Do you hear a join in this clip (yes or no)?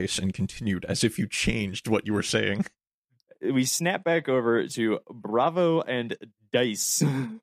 no